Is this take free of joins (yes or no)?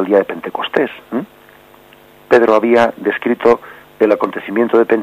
yes